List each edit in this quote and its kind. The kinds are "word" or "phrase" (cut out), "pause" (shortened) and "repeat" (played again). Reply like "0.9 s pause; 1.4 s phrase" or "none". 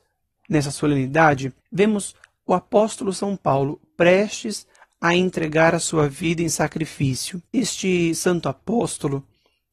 1.6 s pause; 7.5 s pause